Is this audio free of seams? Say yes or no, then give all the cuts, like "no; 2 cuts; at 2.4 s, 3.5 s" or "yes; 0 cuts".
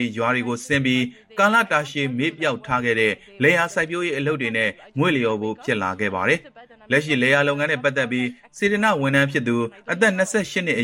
yes; 0 cuts